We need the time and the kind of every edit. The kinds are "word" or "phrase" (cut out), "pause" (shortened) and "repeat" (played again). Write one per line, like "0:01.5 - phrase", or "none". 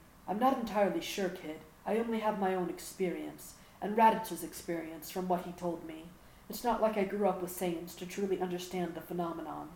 0:01.8 - pause